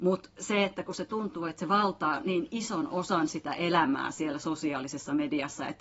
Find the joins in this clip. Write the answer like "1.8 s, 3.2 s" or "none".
none